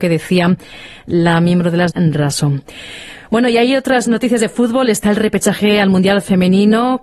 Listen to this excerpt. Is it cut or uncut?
cut